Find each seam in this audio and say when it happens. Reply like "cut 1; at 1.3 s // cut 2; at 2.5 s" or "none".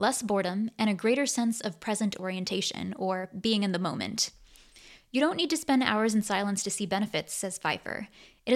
none

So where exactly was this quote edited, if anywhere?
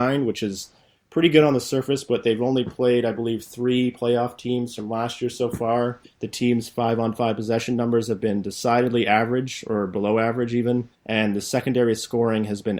cut 1; at 6.0 s // cut 2; at 10.9 s

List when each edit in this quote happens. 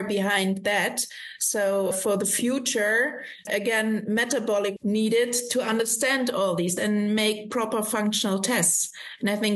cut 1; at 1.9 s // cut 2; at 3.5 s // cut 3; at 4.8 s // cut 4; at 6.8 s

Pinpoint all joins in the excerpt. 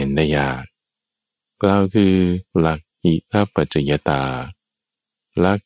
cut 1; at 2.5 s

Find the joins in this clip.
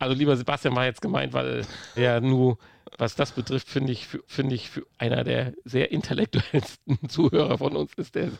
cut 1; at 2.0 s // cut 2; at 4.3 s

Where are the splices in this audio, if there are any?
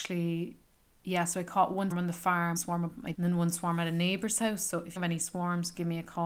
cut 1; at 0.9 s // cut 2; at 1.9 s // cut 3; at 2.6 s // cut 4; at 3.1 s // cut 5; at 5.0 s

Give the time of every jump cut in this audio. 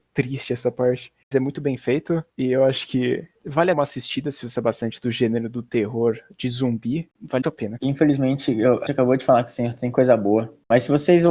cut 1; at 1.3 s // cut 2; at 3.4 s // cut 3; at 3.7 s // cut 4; at 4.6 s // cut 5; at 7.4 s // cut 6; at 7.8 s // cut 7; at 8.9 s

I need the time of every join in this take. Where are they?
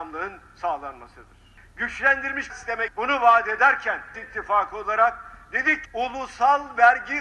cut 1; at 2.5 s // cut 2; at 2.9 s // cut 3; at 4.1 s // cut 4; at 5.9 s

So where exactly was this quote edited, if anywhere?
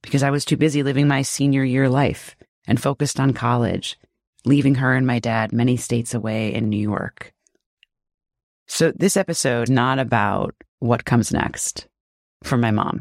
cut 1; at 9.7 s

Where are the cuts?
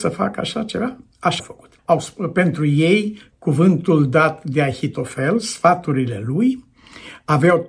cut 1; at 1.4 s // cut 2; at 1.8 s

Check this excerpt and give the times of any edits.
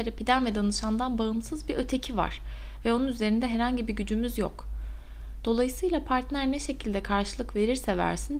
none

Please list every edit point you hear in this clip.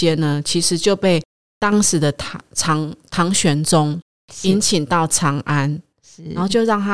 none

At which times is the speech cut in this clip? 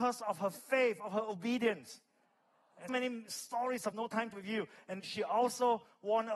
cut 1; at 2.9 s // cut 2; at 3.9 s // cut 3; at 4.3 s // cut 4; at 5.0 s

